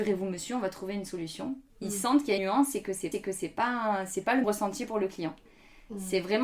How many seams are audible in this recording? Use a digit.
4